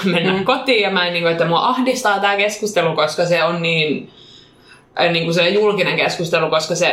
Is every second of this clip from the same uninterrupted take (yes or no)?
yes